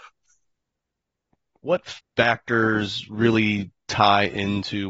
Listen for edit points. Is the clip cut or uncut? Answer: cut